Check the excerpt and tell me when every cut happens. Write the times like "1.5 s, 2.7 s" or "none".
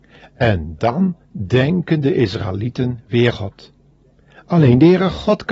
1.2 s, 3.3 s